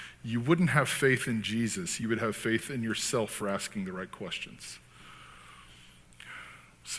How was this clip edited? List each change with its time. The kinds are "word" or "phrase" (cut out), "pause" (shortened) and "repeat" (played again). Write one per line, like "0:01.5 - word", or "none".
none